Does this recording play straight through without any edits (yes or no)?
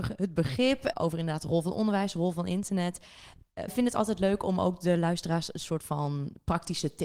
no